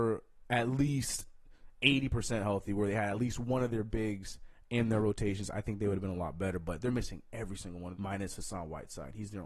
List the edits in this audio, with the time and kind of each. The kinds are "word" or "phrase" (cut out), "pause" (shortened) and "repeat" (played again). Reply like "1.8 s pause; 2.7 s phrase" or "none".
7.9 s phrase